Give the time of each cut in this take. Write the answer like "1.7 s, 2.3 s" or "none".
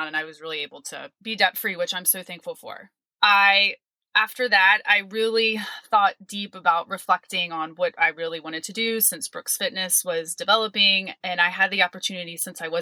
none